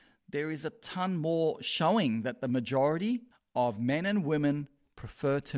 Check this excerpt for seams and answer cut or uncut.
cut